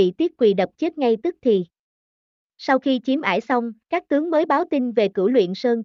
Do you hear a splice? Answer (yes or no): yes